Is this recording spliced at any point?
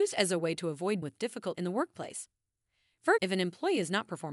yes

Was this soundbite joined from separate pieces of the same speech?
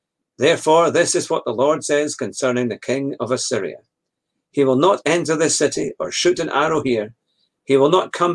no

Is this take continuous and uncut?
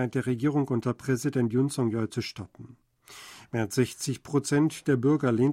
yes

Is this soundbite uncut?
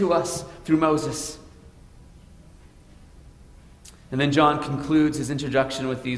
yes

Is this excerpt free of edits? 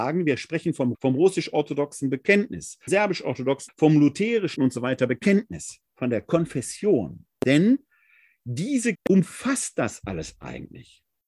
no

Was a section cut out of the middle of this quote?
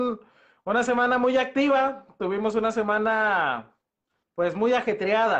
no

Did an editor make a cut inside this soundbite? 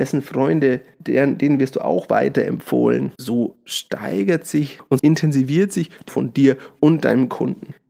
yes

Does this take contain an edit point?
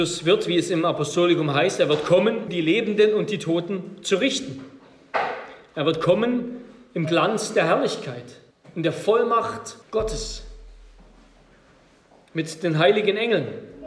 yes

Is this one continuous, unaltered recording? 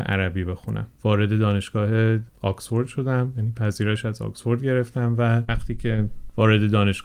yes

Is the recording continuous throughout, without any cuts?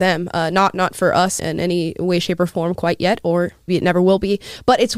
no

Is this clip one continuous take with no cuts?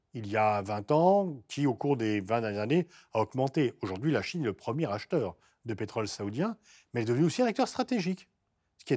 yes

